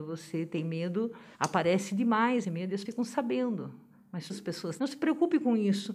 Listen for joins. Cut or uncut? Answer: cut